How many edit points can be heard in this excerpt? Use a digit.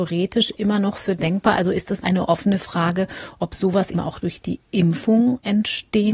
2